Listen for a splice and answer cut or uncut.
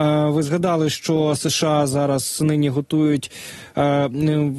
uncut